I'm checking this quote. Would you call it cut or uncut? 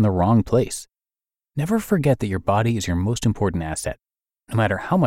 uncut